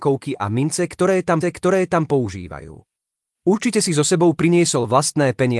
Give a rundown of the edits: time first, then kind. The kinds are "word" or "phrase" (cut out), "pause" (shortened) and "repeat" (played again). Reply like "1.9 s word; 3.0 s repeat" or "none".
1.4 s repeat